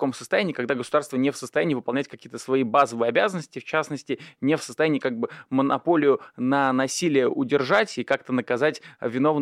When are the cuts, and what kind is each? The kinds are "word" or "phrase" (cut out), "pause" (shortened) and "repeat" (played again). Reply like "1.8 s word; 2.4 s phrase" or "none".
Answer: none